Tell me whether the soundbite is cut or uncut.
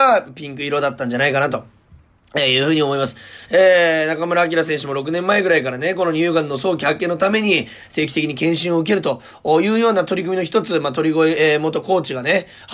uncut